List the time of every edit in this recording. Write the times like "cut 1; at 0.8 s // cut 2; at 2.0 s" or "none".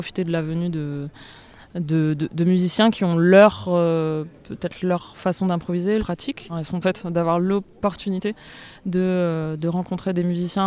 cut 1; at 6.0 s // cut 2; at 6.8 s

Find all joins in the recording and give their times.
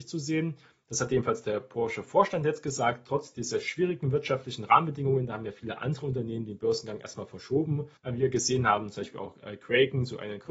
cut 1; at 8.0 s

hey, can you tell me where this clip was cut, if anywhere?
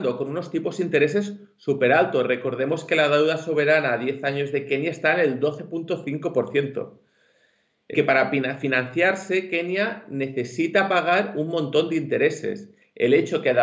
cut 1; at 7.9 s

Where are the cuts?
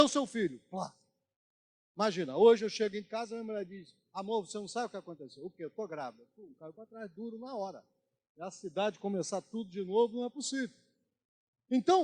none

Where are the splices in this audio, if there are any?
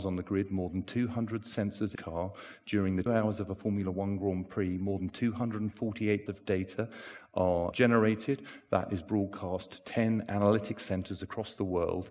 cut 1; at 2.0 s // cut 2; at 3.1 s // cut 3; at 6.3 s // cut 4; at 7.7 s

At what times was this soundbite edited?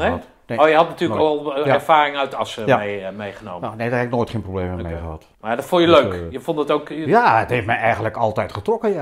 cut 1; at 5.3 s

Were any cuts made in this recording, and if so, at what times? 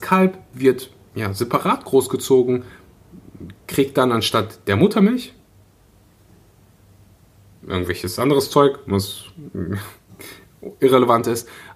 none

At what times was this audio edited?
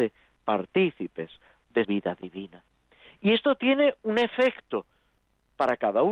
cut 1; at 1.8 s

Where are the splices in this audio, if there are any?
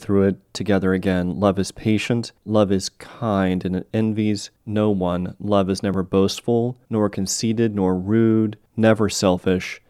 cut 1; at 2.4 s // cut 2; at 4.6 s // cut 3; at 6.8 s // cut 4; at 8.7 s

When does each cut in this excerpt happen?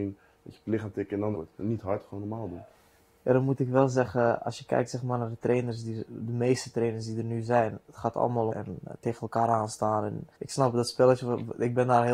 cut 1; at 1.3 s // cut 2; at 8.5 s // cut 3; at 10.3 s

